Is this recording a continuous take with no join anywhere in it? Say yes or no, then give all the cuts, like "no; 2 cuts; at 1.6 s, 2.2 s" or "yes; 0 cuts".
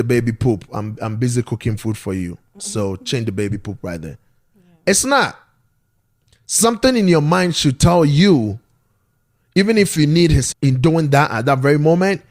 no; 1 cut; at 10.5 s